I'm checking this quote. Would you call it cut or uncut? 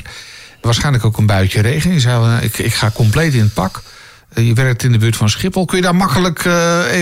uncut